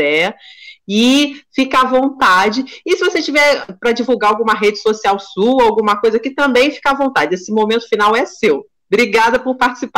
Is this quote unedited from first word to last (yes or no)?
yes